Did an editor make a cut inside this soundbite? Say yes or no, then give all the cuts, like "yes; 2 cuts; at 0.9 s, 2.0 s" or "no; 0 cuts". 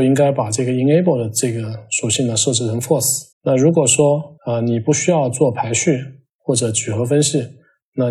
yes; 2 cuts; at 3.3 s, 4.4 s